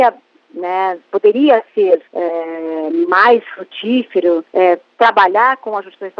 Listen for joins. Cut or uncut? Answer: cut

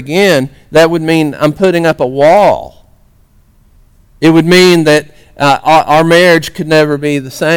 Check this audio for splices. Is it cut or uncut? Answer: uncut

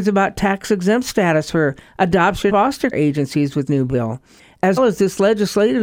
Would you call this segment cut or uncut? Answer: cut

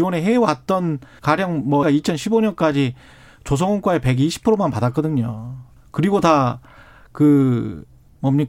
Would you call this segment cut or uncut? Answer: cut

